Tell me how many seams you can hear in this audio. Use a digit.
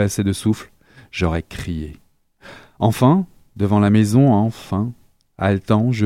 0